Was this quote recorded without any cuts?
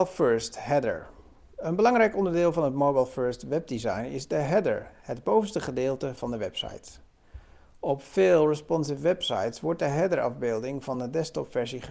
yes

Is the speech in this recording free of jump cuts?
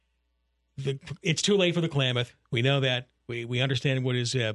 yes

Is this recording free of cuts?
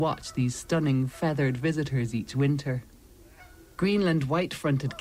yes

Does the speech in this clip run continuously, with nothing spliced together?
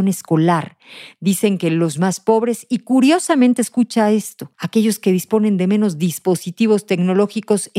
no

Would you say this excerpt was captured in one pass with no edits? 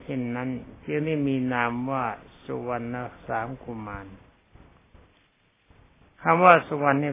yes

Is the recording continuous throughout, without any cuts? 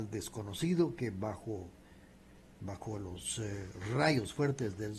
yes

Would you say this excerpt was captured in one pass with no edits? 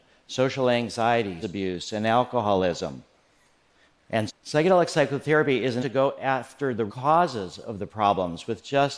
no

